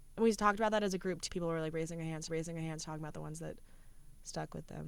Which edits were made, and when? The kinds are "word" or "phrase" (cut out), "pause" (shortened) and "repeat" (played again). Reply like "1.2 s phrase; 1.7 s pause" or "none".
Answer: 1.3 s word; 2.3 s repeat